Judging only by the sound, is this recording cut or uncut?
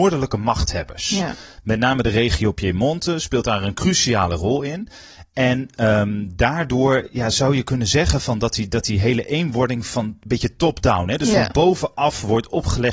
uncut